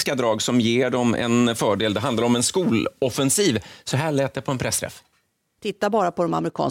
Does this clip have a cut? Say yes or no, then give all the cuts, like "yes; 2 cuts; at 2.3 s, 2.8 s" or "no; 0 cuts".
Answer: no; 0 cuts